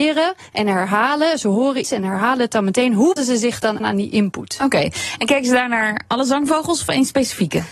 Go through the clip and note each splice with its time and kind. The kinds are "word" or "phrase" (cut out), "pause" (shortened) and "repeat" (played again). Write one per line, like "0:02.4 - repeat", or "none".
0:01.8 - word
0:03.2 - word
0:03.8 - word